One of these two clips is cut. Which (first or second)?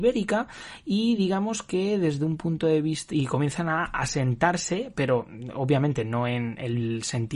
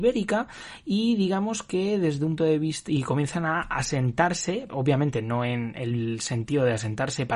second